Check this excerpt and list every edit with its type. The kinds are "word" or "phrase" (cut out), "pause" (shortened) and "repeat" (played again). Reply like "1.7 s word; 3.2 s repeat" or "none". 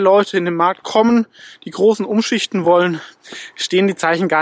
none